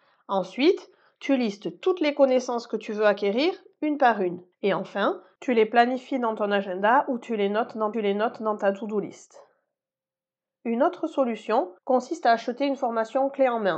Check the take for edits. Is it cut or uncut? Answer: cut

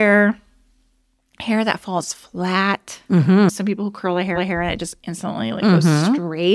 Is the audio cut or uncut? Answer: cut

